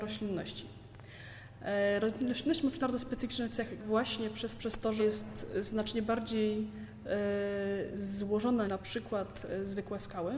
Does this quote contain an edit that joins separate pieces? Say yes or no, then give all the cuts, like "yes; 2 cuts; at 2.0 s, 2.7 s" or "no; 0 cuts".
yes; 5 cuts; at 2.8 s, 3.8 s, 4.6 s, 5.0 s, 8.7 s